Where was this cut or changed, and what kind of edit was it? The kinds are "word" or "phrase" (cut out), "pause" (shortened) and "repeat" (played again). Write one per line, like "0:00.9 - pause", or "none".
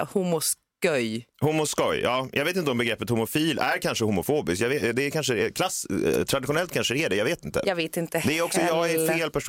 0:01.3 - pause